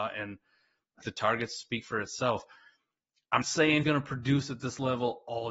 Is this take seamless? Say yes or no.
no